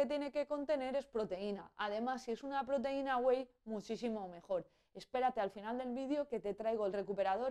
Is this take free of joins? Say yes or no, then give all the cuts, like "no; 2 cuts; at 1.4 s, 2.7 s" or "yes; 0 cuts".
yes; 0 cuts